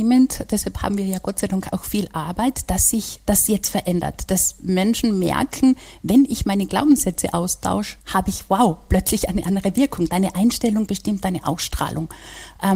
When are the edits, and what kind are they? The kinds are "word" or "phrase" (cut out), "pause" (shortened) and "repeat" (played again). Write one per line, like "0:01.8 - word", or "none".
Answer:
0:08.0 - pause